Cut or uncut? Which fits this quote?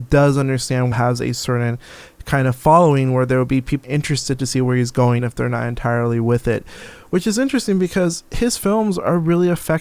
cut